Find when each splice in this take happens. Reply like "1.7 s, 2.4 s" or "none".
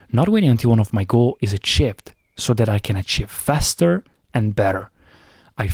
none